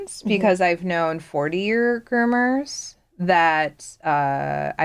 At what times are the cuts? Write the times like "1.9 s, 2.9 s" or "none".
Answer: none

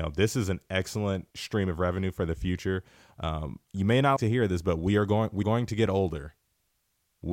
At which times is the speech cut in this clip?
1.3 s, 4.2 s, 5.4 s

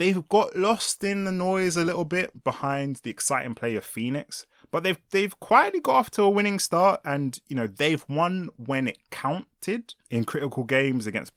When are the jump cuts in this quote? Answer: 10.0 s

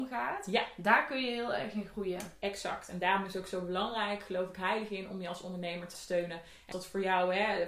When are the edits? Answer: 5.9 s, 6.7 s

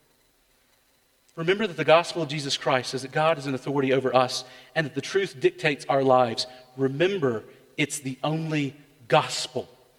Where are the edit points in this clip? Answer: none

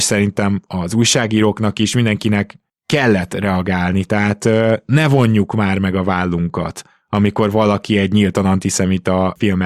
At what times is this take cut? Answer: none

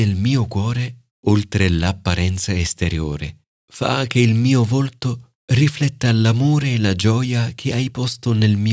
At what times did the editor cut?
3.5 s, 5.4 s

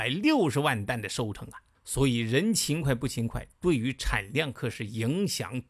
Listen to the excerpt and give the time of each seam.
1.7 s

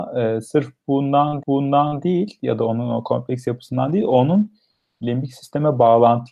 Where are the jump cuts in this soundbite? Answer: 1.4 s

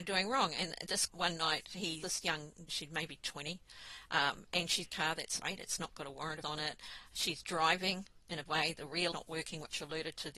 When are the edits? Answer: 1.1 s, 2.0 s, 2.7 s, 4.8 s, 5.4 s, 6.4 s, 8.5 s, 9.1 s

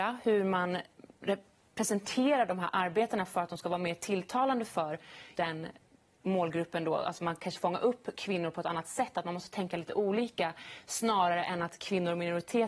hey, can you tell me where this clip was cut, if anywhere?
5.4 s, 7.6 s

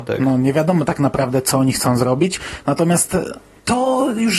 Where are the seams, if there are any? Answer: none

